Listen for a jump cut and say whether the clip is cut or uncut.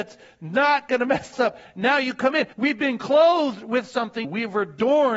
cut